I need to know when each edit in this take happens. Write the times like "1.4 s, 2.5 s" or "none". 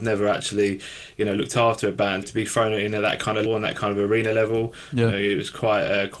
2.2 s, 3.5 s